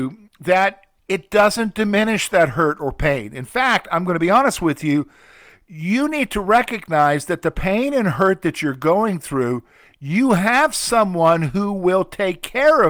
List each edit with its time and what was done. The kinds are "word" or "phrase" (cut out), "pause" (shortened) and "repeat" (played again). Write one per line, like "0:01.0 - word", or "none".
none